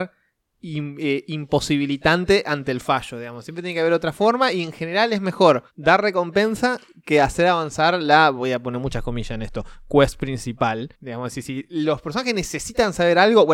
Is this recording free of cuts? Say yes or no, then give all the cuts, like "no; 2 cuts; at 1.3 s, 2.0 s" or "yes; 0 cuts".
no; 2 cuts; at 5.7 s, 10.9 s